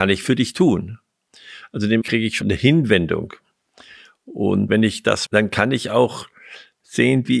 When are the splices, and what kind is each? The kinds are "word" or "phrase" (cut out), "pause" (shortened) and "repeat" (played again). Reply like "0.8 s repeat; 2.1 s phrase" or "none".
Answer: 2.0 s word; 2.4 s word; 4.7 s word; 5.3 s word